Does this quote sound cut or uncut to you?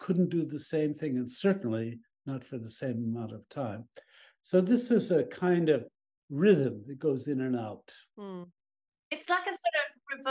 uncut